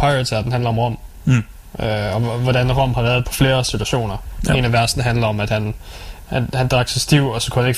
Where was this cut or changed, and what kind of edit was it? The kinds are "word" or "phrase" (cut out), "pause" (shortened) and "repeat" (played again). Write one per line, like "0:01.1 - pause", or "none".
0:03.2 - phrase